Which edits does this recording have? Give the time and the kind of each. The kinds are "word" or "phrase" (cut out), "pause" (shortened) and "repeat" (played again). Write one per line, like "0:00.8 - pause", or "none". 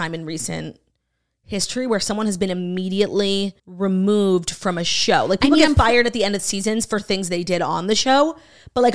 0:03.6 - pause